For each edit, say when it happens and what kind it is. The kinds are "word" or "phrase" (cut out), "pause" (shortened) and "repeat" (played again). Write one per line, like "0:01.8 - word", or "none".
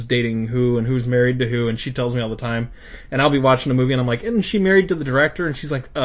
none